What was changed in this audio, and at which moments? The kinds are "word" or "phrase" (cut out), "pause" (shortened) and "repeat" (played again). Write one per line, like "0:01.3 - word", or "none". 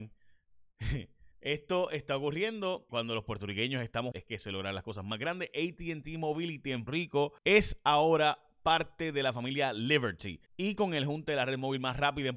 0:01.3 - pause
0:02.9 - word
0:04.1 - word
0:06.9 - word
0:07.4 - pause
0:10.5 - pause